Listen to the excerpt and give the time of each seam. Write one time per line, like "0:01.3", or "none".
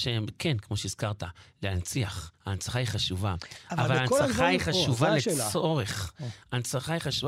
0:02.3